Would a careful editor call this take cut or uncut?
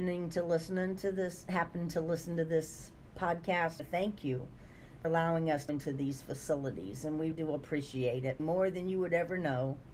cut